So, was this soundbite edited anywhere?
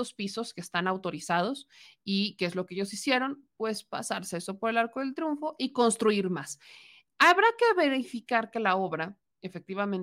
no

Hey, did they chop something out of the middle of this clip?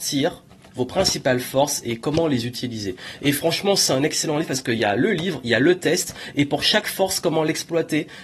no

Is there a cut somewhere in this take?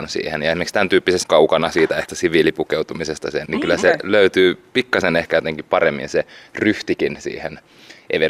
yes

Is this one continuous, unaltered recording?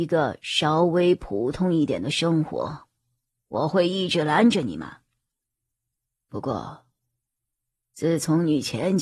yes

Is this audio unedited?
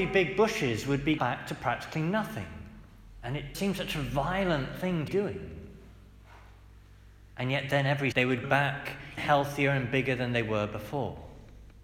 no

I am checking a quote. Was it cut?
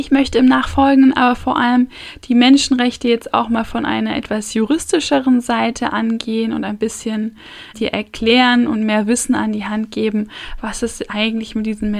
yes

